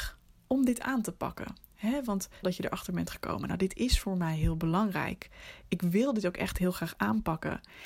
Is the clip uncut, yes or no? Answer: no